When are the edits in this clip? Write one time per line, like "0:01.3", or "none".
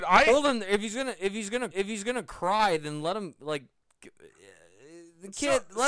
0:01.7